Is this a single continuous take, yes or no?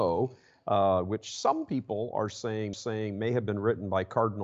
no